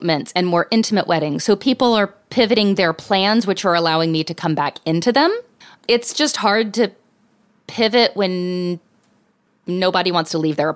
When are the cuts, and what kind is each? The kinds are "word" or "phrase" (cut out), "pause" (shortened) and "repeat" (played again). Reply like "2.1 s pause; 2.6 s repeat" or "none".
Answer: 5.6 s pause